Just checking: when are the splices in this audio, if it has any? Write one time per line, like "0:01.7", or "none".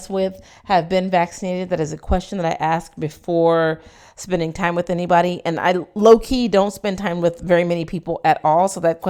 none